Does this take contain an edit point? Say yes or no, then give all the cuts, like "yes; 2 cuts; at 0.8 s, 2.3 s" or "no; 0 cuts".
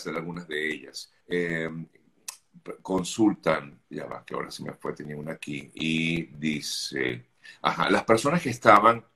yes; 2 cuts; at 1.2 s, 3.8 s